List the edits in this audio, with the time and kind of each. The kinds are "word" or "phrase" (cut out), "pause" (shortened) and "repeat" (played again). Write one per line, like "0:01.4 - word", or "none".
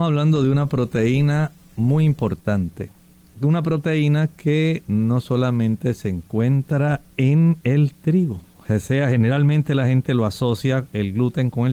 none